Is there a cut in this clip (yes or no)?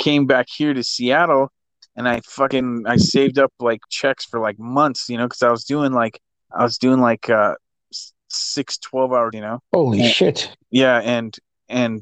yes